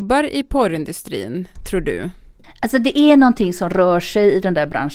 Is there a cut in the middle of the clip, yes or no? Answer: yes